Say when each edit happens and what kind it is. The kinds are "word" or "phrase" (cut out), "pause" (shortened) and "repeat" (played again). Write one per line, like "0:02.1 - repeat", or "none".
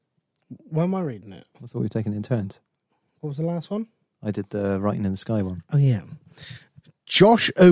none